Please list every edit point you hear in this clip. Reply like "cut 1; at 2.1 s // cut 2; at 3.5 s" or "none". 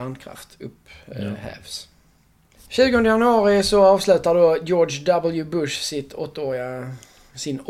none